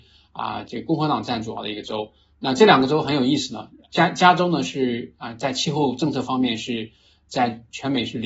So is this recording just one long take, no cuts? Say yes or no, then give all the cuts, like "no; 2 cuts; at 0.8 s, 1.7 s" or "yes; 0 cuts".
yes; 0 cuts